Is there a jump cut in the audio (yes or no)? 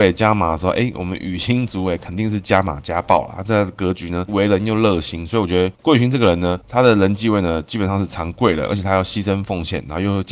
yes